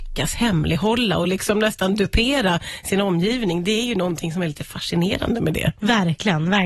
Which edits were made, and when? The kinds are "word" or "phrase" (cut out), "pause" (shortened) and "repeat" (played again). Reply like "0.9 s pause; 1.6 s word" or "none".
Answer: none

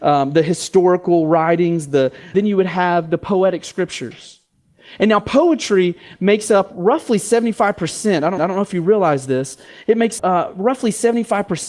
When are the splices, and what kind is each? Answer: 2.3 s phrase; 8.4 s repeat; 10.2 s word

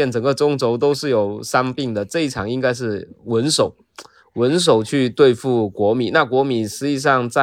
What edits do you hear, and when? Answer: none

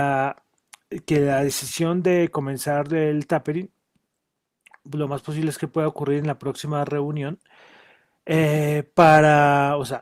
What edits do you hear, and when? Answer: none

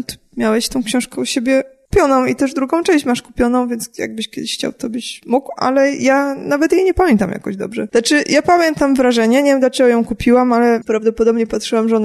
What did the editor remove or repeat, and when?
none

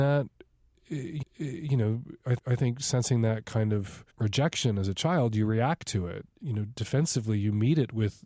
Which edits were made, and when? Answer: 1.2 s repeat; 2.4 s repeat; 4.1 s pause

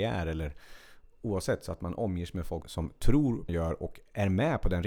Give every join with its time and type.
2.6 s word; 3.5 s phrase

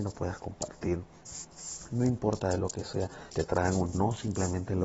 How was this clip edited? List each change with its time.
3.3 s word; 3.9 s word

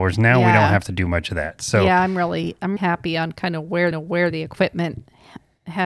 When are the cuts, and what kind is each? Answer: 2.8 s word; 3.9 s repeat

